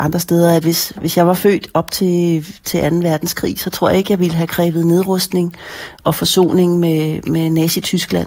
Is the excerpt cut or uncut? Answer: uncut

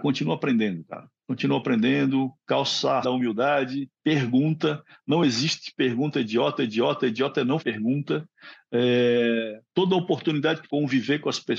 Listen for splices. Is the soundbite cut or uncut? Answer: cut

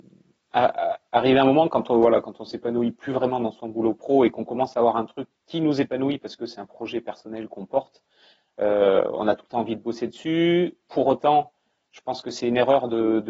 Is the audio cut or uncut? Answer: uncut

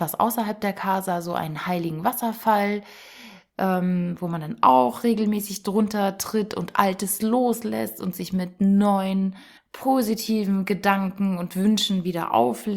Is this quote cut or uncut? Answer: cut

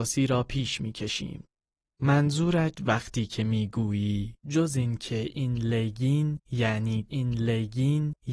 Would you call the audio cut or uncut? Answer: cut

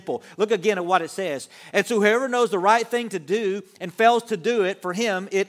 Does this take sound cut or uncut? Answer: uncut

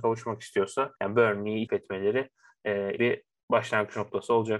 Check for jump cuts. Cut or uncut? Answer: cut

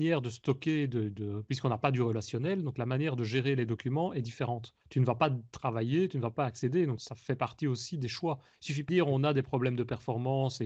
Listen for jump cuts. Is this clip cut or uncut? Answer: cut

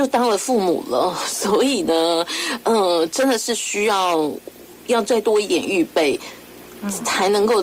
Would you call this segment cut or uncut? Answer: uncut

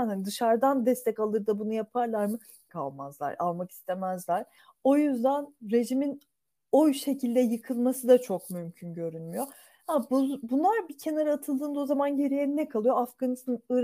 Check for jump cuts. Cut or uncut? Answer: cut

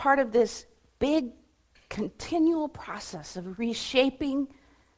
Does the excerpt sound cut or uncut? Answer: uncut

